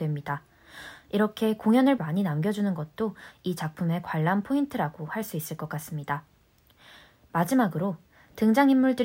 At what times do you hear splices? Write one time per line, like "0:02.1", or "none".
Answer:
0:02.0